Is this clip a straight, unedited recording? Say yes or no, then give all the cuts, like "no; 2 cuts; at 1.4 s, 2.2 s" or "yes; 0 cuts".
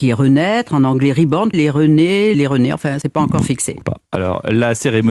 no; 4 cuts; at 1.5 s, 2.3 s, 3.0 s, 3.8 s